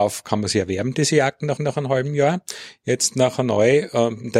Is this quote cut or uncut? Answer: cut